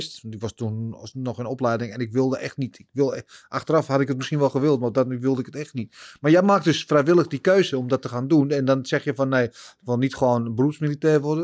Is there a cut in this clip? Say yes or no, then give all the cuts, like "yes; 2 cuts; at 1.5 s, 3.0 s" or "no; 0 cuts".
no; 0 cuts